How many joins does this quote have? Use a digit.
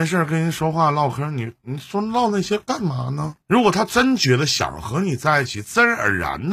1